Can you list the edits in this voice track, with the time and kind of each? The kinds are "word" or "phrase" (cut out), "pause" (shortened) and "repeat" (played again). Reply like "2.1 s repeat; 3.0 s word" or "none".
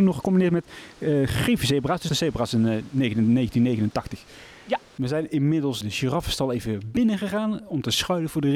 2.1 s phrase; 5.8 s word